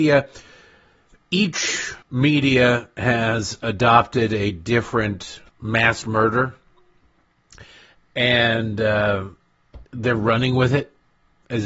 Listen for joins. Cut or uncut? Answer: cut